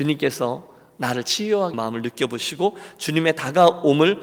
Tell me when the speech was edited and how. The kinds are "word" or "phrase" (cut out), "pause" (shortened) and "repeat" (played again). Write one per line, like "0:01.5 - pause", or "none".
0:01.7 - word